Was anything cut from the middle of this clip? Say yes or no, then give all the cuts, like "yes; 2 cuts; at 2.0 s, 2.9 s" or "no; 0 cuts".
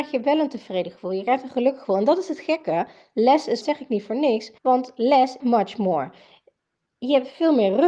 yes; 3 cuts; at 3.6 s, 4.6 s, 5.4 s